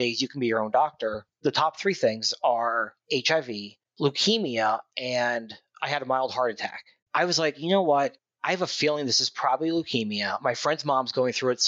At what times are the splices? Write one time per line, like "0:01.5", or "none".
0:03.0
0:07.0